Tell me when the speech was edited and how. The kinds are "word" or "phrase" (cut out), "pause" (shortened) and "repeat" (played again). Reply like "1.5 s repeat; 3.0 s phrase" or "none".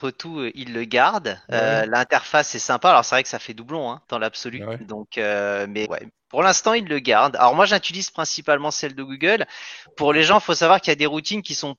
5.8 s word